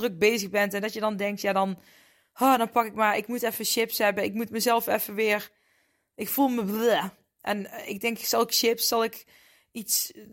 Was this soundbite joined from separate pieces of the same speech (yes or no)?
no